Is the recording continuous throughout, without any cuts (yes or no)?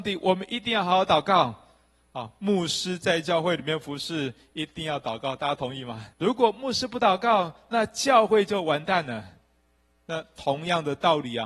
no